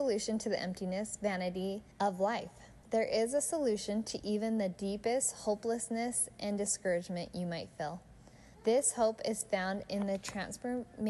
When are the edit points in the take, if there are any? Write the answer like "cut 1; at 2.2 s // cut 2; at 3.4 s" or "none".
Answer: cut 1; at 1.9 s // cut 2; at 2.8 s // cut 3; at 8.5 s